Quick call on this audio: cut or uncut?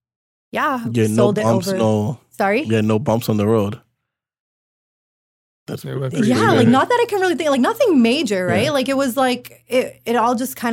uncut